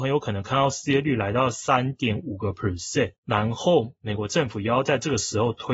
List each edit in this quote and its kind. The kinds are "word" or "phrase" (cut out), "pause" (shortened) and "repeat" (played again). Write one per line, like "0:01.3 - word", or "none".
0:03.2 - pause